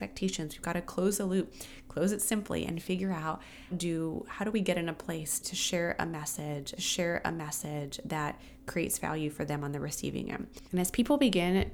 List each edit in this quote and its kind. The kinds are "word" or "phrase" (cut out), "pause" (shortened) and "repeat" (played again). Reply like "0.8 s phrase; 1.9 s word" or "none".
3.7 s word; 5.4 s word; 6.8 s repeat; 10.7 s pause